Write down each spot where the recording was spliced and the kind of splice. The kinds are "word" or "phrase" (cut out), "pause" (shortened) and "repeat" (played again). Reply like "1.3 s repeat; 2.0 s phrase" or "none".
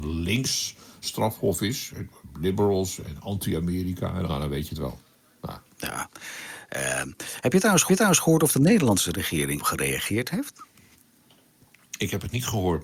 4.3 s word; 7.9 s repeat; 9.6 s word